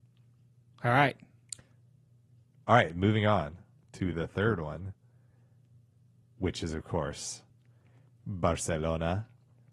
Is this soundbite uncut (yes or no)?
yes